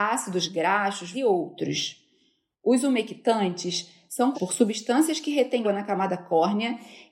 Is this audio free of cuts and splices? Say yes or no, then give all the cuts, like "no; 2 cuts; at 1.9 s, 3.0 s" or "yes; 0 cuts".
no; 3 cuts; at 1.1 s, 4.3 s, 5.6 s